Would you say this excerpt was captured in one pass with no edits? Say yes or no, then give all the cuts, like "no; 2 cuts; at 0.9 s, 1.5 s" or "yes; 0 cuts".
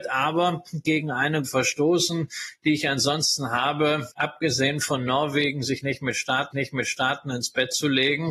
no; 3 cuts; at 1.4 s, 4.1 s, 6.5 s